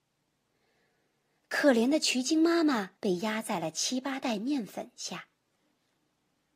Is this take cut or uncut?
cut